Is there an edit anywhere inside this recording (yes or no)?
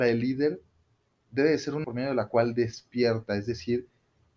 yes